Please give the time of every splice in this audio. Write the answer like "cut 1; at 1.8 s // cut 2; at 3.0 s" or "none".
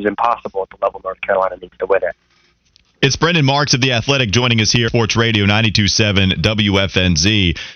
cut 1; at 4.9 s